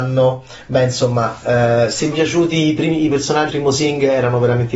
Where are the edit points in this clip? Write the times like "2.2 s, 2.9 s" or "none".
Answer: 2.1 s, 3.5 s